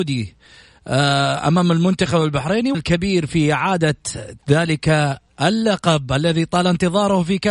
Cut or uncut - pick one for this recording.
cut